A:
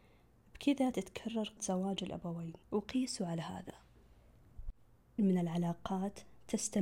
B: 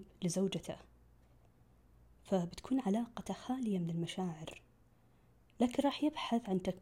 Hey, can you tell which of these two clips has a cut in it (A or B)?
A